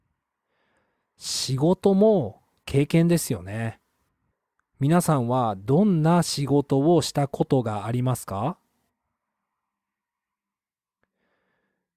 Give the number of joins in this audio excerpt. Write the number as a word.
one